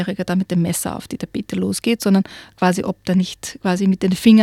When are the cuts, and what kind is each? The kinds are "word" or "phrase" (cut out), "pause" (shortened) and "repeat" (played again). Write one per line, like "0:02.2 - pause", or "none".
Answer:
none